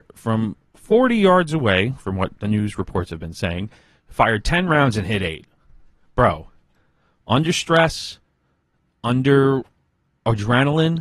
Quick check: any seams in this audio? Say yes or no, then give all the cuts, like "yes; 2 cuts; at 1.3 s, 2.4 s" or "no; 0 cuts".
no; 0 cuts